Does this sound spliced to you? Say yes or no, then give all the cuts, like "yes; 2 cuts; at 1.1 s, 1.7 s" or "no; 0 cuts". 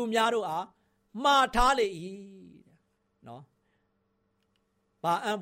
no; 0 cuts